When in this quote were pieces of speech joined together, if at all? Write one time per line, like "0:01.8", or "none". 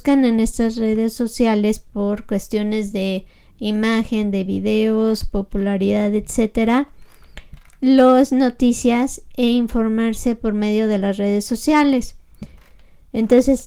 none